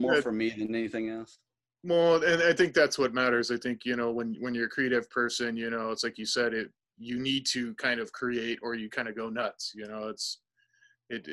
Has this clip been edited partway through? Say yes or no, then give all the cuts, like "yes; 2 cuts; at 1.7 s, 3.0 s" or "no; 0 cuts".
no; 0 cuts